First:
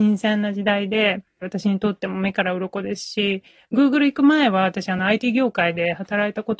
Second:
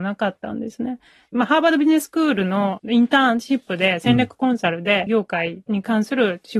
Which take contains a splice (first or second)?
second